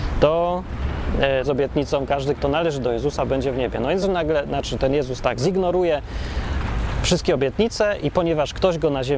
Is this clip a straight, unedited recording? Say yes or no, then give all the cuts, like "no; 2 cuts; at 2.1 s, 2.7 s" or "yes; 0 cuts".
no; 2 cuts; at 1.4 s, 4.0 s